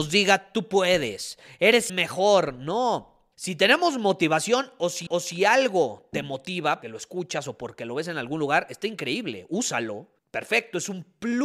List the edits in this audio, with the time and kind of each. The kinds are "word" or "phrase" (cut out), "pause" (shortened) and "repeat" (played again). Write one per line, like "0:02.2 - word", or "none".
0:01.9 - word
0:03.3 - pause
0:05.1 - repeat
0:06.8 - word
0:10.2 - pause